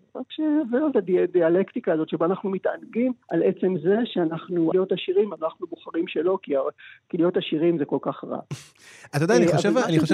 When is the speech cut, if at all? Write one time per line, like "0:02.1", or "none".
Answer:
0:00.9
0:03.2
0:04.7